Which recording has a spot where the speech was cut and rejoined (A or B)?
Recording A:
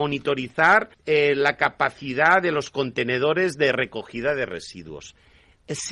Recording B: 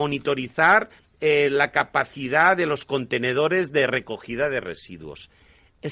A